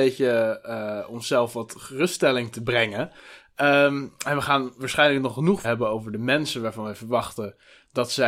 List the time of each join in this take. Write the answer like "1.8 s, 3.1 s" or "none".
5.6 s